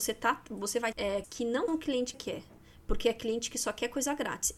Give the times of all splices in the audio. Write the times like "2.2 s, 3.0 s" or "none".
0.9 s, 1.2 s, 1.7 s, 2.1 s